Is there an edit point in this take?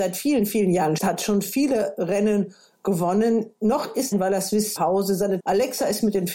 yes; 4 cuts; at 1.0 s, 4.1 s, 4.8 s, 5.4 s

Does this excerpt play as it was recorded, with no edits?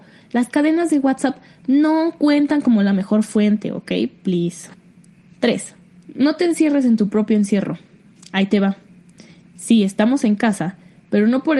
yes; 0 cuts

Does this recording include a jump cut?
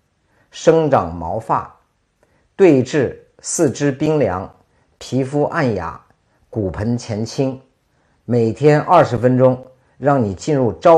no; 0 cuts

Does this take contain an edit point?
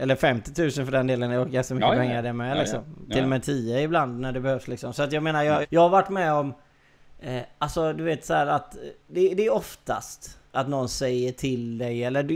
yes; 2 cuts; at 5.6 s, 10.5 s

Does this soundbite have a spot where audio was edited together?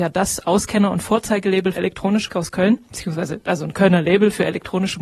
yes; 2 cuts; at 1.7 s, 2.3 s

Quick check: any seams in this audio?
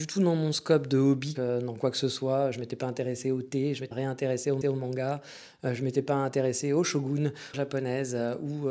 yes; 4 cuts; at 1.3 s, 3.9 s, 4.6 s, 7.5 s

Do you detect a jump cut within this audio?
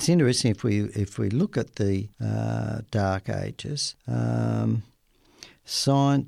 yes; 2 cuts; at 2.1 s, 4.0 s

